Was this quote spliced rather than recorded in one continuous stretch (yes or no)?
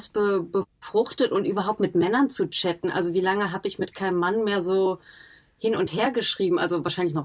no